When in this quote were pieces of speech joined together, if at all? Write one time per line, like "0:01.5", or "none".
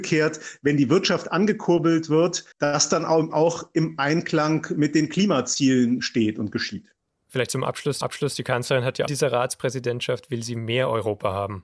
0:02.5
0:03.3
0:08.0
0:09.1